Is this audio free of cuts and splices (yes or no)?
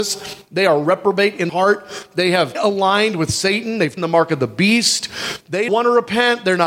no